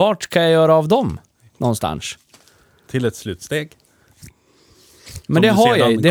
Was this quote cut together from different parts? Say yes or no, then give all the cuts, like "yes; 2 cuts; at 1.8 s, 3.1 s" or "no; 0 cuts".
no; 0 cuts